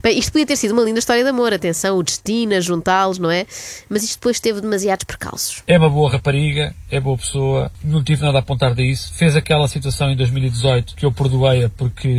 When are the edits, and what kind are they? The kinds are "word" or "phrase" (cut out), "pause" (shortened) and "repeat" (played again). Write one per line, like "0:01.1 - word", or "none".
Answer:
none